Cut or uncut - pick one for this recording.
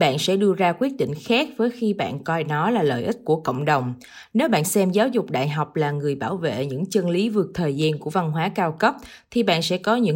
uncut